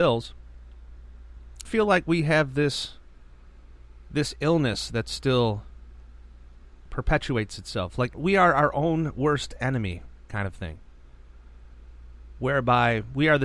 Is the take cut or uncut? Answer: cut